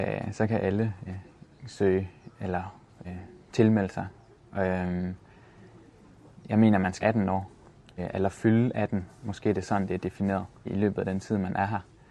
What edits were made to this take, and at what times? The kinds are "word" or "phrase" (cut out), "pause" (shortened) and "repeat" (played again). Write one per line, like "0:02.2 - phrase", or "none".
0:01.1 - word
0:03.0 - word
0:07.0 - word
0:08.0 - word
0:10.7 - word